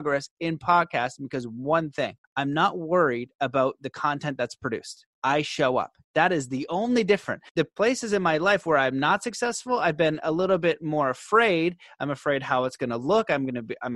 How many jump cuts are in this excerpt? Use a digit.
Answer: 3